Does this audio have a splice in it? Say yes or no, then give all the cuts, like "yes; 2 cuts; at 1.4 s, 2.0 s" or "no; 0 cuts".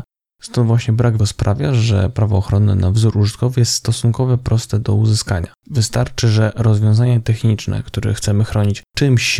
yes; 2 cuts; at 1.2 s, 5.6 s